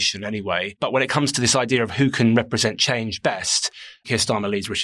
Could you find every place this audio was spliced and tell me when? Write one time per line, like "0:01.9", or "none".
none